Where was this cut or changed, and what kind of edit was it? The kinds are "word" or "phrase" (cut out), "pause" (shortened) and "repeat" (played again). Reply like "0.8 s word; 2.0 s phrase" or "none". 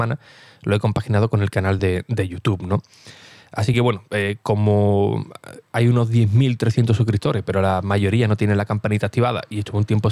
none